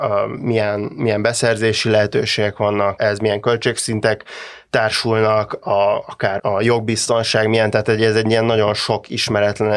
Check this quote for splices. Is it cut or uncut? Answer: cut